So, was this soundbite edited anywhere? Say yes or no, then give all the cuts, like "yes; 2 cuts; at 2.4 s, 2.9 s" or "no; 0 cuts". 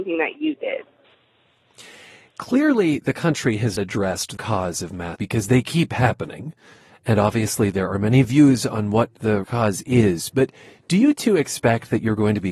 yes; 4 cuts; at 3.8 s, 4.4 s, 5.1 s, 9.4 s